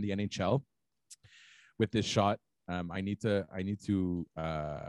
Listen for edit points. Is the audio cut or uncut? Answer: uncut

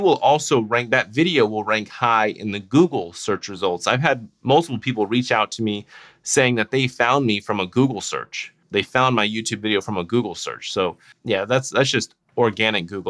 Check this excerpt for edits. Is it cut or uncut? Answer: uncut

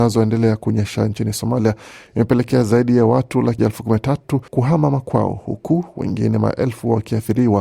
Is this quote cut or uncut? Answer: cut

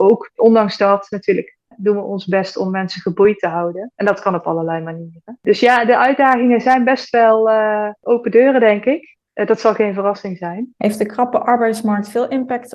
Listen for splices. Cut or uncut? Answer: uncut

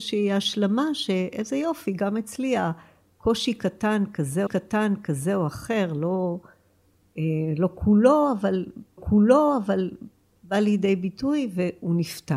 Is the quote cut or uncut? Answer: cut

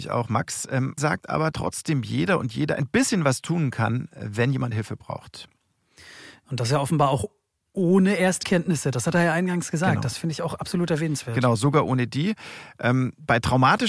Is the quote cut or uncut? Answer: cut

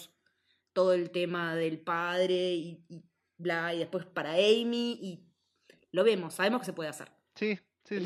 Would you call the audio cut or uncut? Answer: uncut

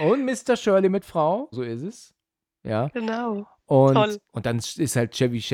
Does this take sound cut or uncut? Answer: cut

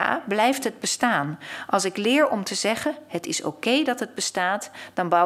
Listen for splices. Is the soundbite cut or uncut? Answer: uncut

